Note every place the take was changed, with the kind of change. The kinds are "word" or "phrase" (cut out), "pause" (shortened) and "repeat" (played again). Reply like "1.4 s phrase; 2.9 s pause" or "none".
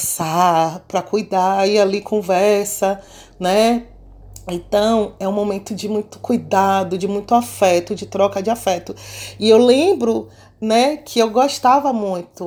none